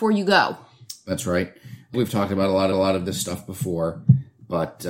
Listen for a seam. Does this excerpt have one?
yes; 2 cuts; at 1.9 s, 2.7 s

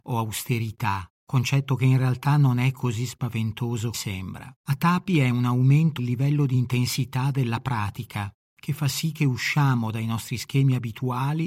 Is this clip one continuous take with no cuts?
no; 5 cuts; at 1.1 s, 3.9 s, 4.6 s, 6.0 s, 8.4 s

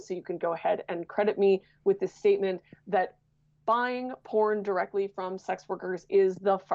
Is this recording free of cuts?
yes; 0 cuts

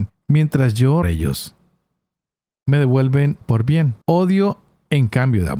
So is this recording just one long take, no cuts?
no; 3 cuts; at 1.0 s, 3.4 s, 4.0 s

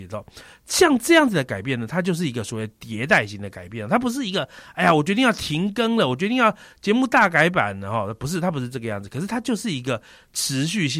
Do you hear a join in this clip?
no; 0 cuts

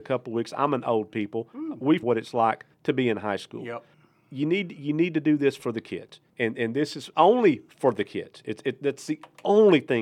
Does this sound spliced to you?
yes; 5 cuts; at 2.0 s, 2.7 s, 3.9 s, 6.3 s, 7.1 s

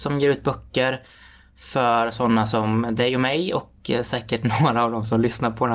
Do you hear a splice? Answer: no; 0 cuts

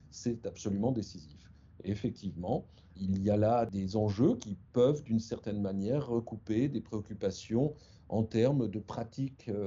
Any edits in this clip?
no; 0 cuts

